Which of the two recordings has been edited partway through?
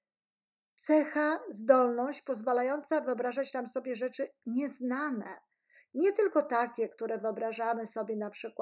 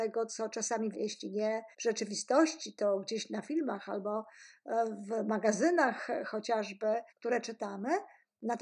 second; 3 cuts; at 0.9 s, 1.7 s, 7.1 s

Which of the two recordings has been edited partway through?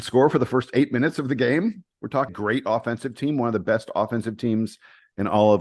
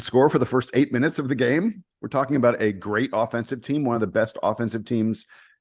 first; 1 cut; at 2.3 s

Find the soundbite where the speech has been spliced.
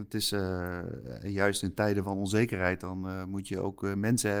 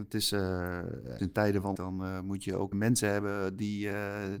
second; 3 cuts; at 1.2 s, 1.7 s, 2.7 s

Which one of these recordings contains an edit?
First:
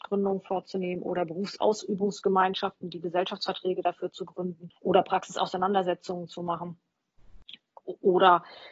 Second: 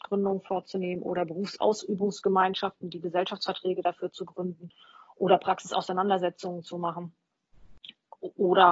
first; 1 cut; at 4.8 s

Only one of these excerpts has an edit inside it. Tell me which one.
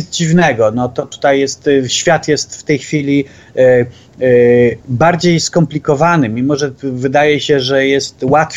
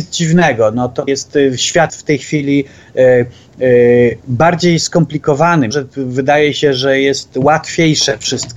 second; 3 cuts; at 1.1 s, 1.9 s, 5.7 s

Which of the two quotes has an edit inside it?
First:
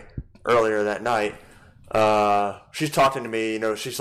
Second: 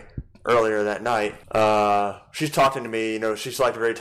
second; 1 cut; at 1.4 s

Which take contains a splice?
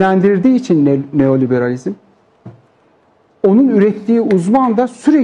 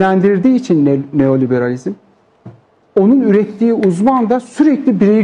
second; 1 cut; at 2.6 s

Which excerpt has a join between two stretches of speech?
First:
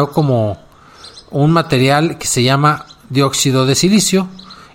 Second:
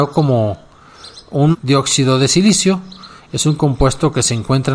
second; 1 cut; at 1.5 s

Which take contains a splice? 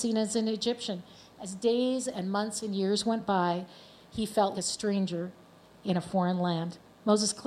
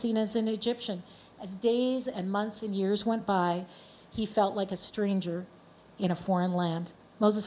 first; 1 cut; at 4.5 s

